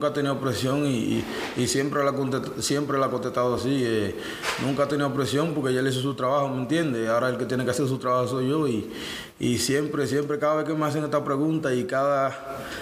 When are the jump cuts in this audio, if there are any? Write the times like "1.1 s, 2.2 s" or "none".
none